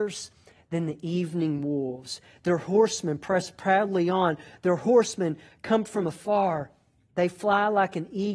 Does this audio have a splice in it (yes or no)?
no